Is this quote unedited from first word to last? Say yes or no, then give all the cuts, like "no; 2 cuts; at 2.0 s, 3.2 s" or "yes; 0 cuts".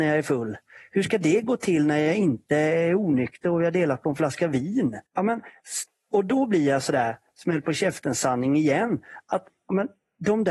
no; 1 cut; at 5.1 s